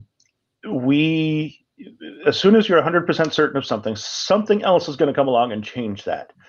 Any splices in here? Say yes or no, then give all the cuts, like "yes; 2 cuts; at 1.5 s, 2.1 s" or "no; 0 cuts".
no; 0 cuts